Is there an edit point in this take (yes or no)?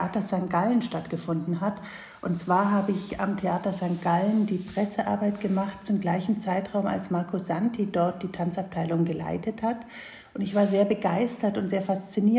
no